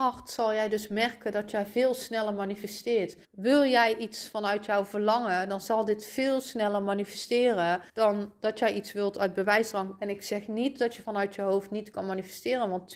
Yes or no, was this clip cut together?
yes